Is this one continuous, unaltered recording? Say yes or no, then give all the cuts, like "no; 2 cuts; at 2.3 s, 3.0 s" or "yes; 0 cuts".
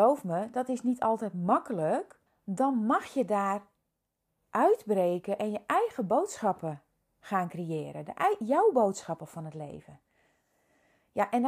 no; 1 cut; at 2.3 s